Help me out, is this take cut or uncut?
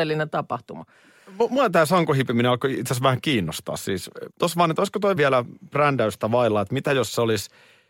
cut